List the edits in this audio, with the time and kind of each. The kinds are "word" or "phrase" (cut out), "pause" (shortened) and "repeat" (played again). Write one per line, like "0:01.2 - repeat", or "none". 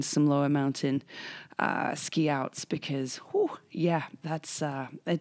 none